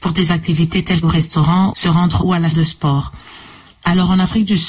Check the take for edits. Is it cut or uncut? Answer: cut